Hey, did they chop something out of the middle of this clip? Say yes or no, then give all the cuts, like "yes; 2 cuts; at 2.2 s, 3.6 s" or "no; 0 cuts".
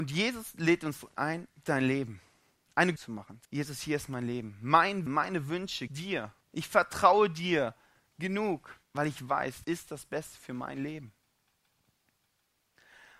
yes; 8 cuts; at 1.6 s, 3.0 s, 3.4 s, 5.1 s, 5.9 s, 6.4 s, 8.8 s, 9.6 s